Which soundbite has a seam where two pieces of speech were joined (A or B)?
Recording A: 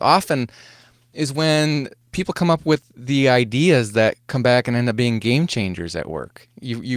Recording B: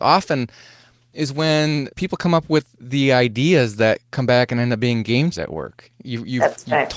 B